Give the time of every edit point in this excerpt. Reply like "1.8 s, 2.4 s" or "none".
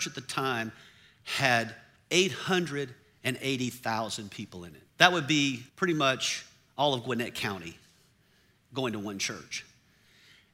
4.9 s, 5.7 s